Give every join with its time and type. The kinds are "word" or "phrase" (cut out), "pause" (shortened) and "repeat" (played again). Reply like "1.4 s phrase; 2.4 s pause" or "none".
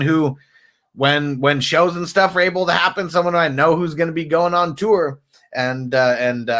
none